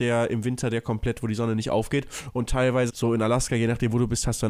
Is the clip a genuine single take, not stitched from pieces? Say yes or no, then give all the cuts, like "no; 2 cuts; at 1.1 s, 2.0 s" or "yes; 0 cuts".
no; 1 cut; at 2.9 s